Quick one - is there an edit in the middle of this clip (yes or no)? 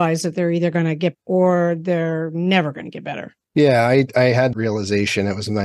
yes